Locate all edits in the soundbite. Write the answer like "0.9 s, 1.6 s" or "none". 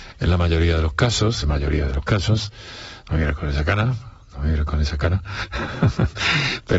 1.4 s